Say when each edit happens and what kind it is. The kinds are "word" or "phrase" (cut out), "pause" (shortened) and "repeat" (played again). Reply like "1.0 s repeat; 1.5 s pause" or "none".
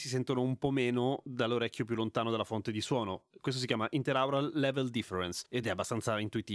none